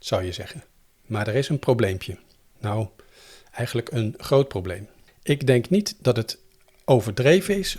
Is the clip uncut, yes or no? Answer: yes